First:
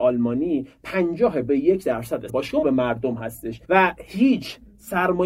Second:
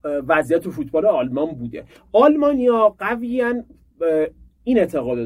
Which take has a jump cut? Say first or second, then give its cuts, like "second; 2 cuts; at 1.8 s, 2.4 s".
first; 4 cuts; at 1.5 s, 2.3 s, 2.6 s, 3.6 s